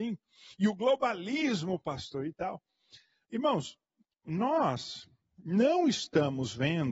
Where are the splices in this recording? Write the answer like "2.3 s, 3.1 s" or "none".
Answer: 5.2 s